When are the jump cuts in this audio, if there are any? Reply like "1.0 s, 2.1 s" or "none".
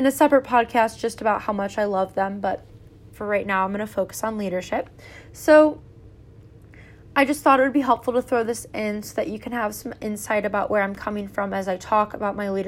none